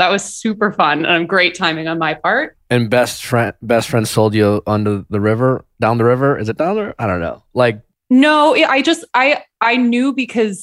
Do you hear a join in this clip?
no; 0 cuts

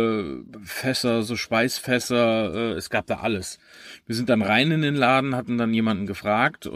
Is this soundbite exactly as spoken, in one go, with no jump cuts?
yes; 0 cuts

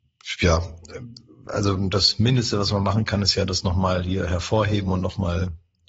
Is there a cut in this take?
no; 0 cuts

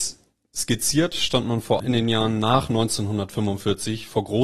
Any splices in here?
yes; 1 cut; at 1.8 s

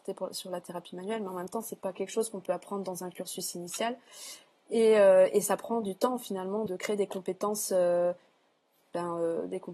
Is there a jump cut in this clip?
yes; 1 cut; at 6.7 s

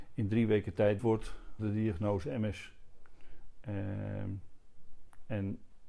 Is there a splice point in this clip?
yes; 2 cuts; at 1.0 s, 1.6 s

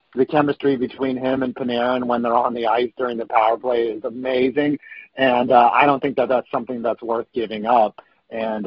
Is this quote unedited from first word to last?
yes; 0 cuts

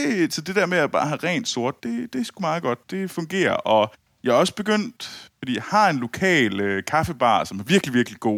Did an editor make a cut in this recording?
no; 0 cuts

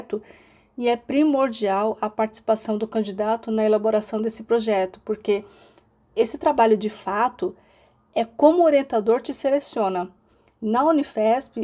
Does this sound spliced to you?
no; 0 cuts

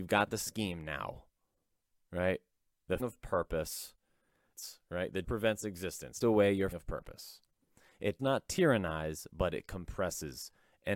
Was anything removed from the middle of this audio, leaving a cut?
yes; 5 cuts; at 3.0 s, 5.2 s, 6.2 s, 6.7 s, 8.2 s

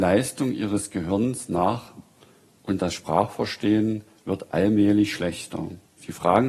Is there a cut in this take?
no; 0 cuts

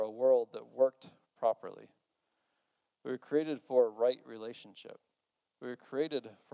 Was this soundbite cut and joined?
no; 0 cuts

